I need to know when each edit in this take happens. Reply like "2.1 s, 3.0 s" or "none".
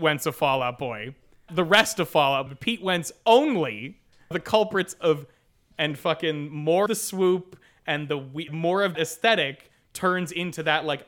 1.5 s, 2.5 s, 4.3 s, 5.7 s, 6.9 s, 8.5 s, 8.9 s